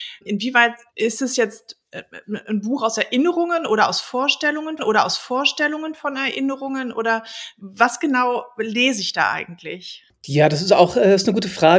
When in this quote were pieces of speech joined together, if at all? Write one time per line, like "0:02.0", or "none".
0:04.8